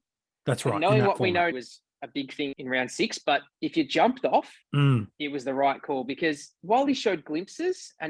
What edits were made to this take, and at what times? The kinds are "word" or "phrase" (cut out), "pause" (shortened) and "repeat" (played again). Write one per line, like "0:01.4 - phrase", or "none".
0:01.5 - phrase
0:02.5 - word
0:03.5 - pause
0:04.6 - pause